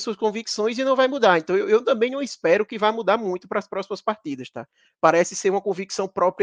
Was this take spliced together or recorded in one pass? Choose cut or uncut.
uncut